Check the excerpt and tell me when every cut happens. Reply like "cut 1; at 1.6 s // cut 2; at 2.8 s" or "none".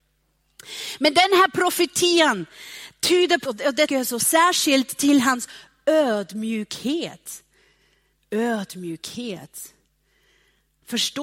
cut 1; at 3.4 s // cut 2; at 3.9 s // cut 3; at 4.2 s

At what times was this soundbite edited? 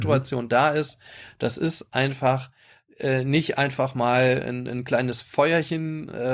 none

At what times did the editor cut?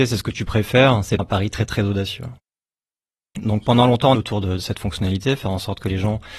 cut 1; at 1.2 s // cut 2; at 4.1 s

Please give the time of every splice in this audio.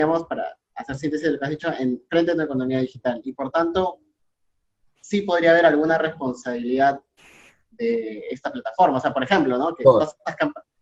none

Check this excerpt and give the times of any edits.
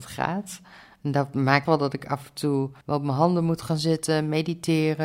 cut 1; at 1.6 s // cut 2; at 2.8 s

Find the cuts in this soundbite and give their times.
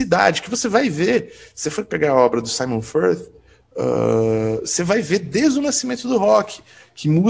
none

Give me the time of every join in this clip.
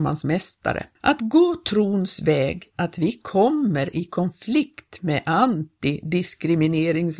cut 1; at 0.9 s // cut 2; at 2.7 s

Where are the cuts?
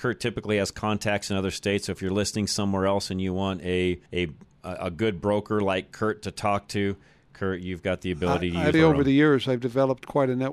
cut 1; at 4.1 s // cut 2; at 8.7 s

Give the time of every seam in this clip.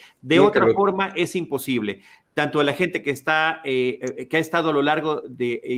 none

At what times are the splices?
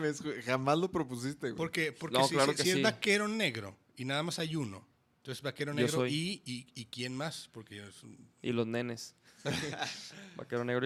cut 1; at 5.0 s

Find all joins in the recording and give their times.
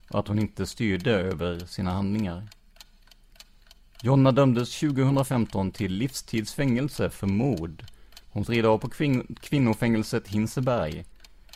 cut 1; at 8.5 s

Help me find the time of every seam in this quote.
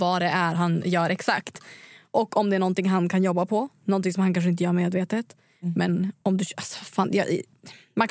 none

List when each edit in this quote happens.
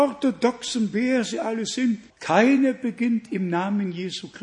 cut 1; at 2.1 s

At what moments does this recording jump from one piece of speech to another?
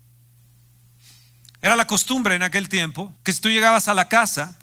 cut 1; at 3.2 s

